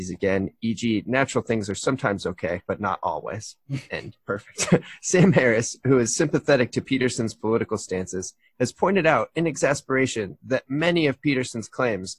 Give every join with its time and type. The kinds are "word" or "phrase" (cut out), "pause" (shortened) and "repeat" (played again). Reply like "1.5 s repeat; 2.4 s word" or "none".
2.6 s pause; 4.2 s pause